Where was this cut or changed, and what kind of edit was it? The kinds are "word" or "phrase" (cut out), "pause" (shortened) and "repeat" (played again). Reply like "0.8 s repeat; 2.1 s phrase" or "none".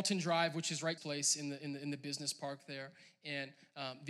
1.0 s phrase